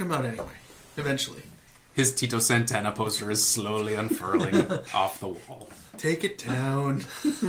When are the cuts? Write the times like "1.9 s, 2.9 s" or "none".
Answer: 1.7 s